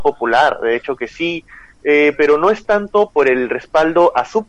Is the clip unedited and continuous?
yes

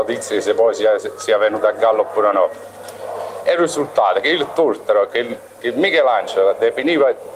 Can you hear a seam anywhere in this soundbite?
no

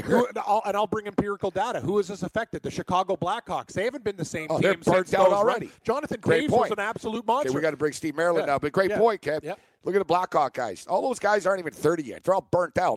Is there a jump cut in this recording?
no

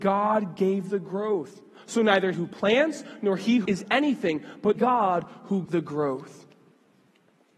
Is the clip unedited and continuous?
no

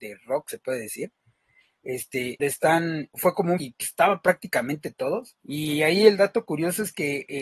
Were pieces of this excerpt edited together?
yes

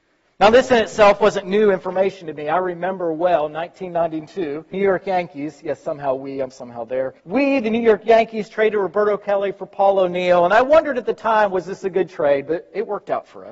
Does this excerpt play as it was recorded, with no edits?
no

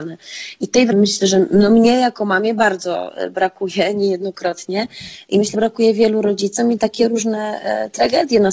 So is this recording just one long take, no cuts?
no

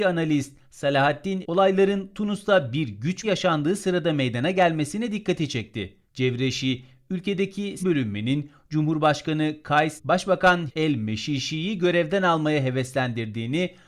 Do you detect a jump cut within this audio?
yes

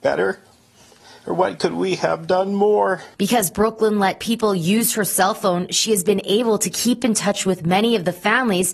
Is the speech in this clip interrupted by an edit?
yes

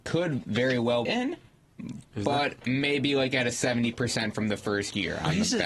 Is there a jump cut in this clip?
yes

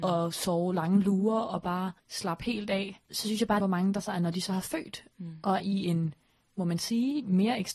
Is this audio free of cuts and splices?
no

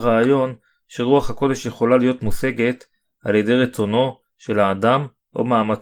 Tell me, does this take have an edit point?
no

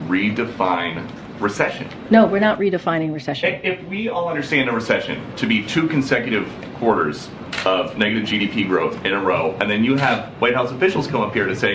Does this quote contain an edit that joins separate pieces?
no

